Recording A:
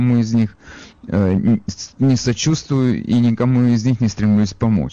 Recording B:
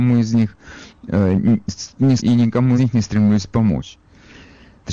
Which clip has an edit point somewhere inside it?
B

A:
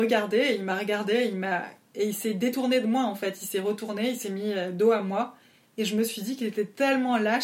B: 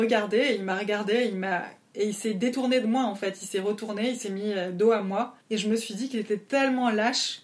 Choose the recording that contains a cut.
B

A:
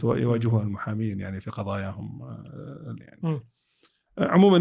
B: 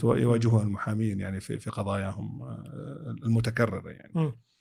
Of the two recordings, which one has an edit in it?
A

